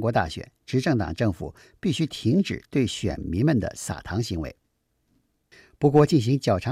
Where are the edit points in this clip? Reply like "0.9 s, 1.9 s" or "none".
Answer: none